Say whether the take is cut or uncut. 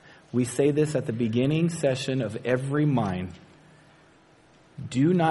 uncut